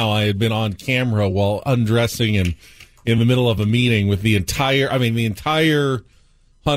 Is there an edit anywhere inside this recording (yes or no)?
no